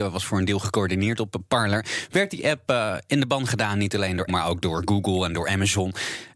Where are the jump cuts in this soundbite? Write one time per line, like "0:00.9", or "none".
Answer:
0:04.3